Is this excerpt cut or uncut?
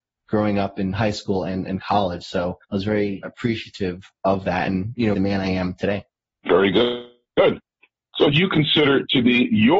cut